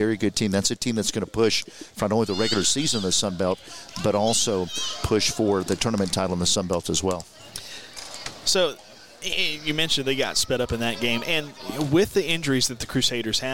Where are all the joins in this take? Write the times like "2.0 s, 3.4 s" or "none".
none